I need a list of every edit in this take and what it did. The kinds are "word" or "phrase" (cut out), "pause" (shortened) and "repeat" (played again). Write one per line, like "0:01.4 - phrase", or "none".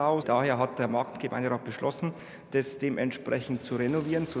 none